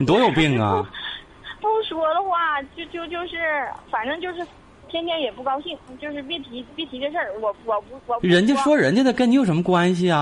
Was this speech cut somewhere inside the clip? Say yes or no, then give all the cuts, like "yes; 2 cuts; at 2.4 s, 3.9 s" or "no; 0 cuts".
no; 0 cuts